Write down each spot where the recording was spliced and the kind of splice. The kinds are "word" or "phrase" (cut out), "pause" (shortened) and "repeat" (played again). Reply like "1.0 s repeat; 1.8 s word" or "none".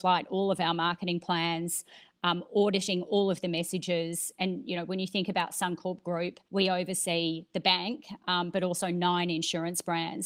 6.5 s pause